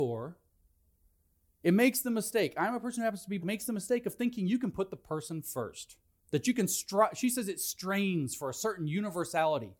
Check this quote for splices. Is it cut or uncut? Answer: cut